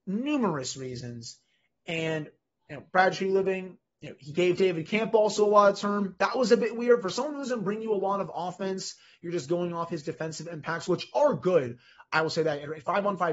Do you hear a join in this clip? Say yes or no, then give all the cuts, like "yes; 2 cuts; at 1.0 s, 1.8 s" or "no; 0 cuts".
no; 0 cuts